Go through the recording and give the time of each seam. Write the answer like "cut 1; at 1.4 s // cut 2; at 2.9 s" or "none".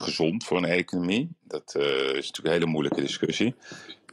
none